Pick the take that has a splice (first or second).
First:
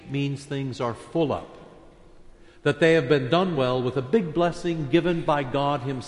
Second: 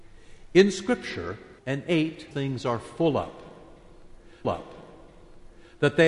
second